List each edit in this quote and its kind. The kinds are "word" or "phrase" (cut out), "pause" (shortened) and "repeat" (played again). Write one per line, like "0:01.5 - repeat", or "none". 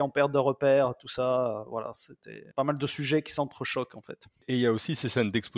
0:02.5 - pause